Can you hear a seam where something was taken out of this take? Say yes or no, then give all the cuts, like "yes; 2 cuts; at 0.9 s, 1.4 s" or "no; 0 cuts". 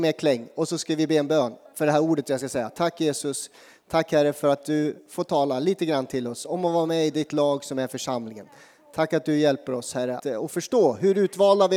yes; 1 cut; at 10.2 s